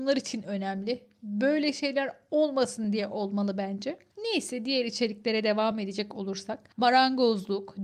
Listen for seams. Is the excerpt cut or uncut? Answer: uncut